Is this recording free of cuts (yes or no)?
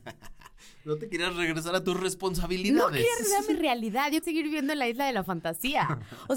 no